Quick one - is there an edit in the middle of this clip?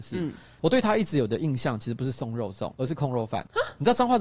yes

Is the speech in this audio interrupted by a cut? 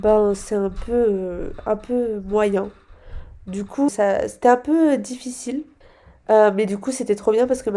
yes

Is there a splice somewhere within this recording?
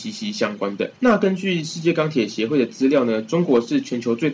yes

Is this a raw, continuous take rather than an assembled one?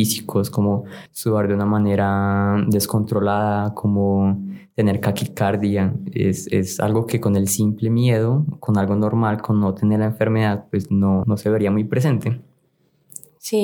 no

